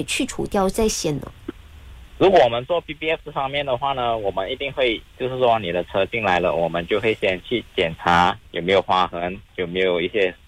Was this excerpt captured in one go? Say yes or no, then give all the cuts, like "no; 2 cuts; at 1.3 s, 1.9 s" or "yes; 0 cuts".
yes; 0 cuts